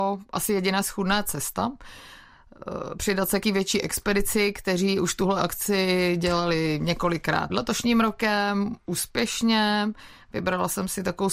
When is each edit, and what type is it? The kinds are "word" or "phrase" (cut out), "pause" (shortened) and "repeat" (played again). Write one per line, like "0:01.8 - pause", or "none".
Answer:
0:03.4 - word
0:07.5 - word